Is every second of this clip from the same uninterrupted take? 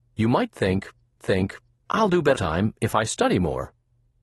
no; 2 cuts; at 1.2 s, 2.4 s

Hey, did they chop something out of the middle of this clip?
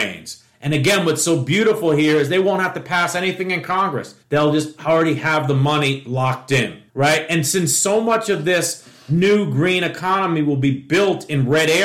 yes; 2 cuts; at 4.2 s, 6.9 s

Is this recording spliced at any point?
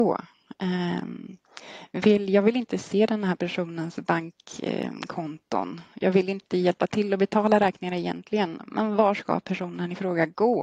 no; 0 cuts

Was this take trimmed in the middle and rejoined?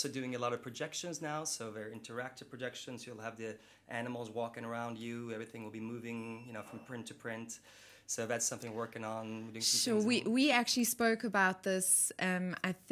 no; 0 cuts

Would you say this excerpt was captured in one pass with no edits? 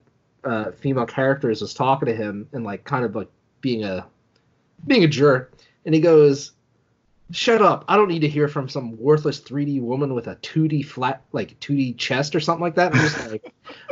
yes; 0 cuts

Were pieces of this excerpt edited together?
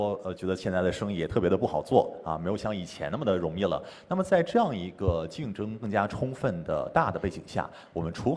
no; 0 cuts

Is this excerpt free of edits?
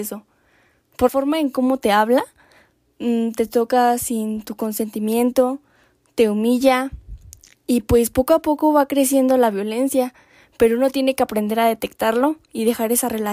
no; 1 cut; at 1.1 s

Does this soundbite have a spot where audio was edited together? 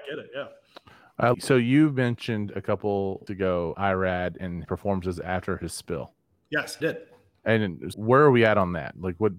yes; 6 cuts; at 1.3 s, 3.3 s, 3.7 s, 4.6 s, 6.8 s, 7.9 s

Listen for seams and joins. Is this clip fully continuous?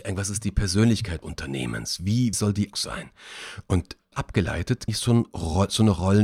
no; 5 cuts; at 1.2 s, 2.3 s, 2.7 s, 4.1 s, 4.9 s

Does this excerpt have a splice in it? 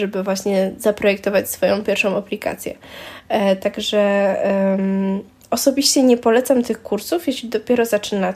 no; 0 cuts

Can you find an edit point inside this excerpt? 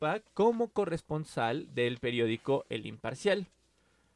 no; 0 cuts

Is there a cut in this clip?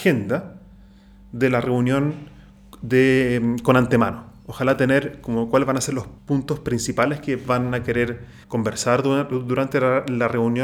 yes; 2 cuts; at 6.2 s, 8.4 s

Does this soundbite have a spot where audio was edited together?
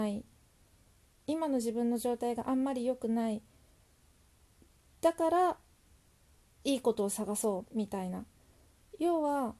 no; 0 cuts

